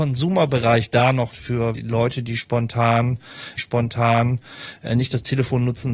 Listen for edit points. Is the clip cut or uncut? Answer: cut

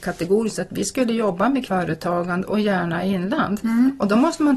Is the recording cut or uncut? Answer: cut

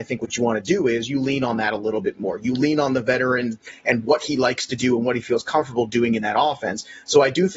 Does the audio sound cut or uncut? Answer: uncut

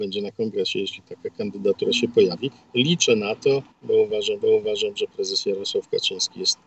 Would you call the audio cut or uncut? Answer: cut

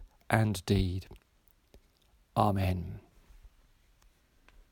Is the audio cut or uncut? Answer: uncut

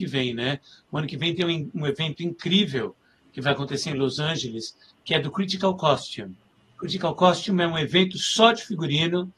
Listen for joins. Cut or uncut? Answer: uncut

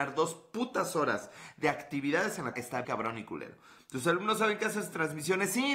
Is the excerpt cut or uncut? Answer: cut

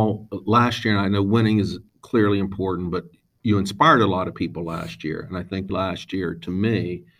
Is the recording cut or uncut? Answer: cut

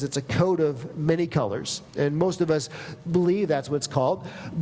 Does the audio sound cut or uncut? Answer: uncut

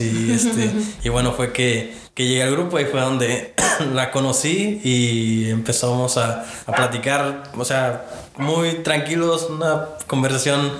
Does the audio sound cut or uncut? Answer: uncut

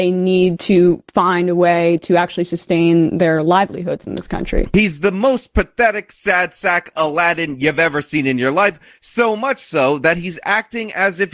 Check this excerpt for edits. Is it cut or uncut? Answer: uncut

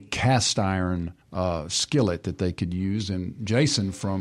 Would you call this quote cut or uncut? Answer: cut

